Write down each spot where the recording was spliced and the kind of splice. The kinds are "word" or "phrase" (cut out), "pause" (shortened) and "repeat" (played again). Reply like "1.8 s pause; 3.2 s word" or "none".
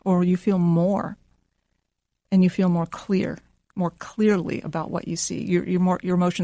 none